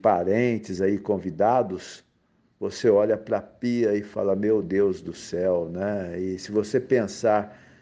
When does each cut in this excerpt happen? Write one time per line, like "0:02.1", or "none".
none